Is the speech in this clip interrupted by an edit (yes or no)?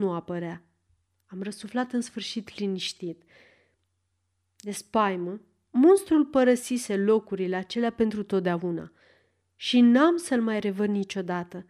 no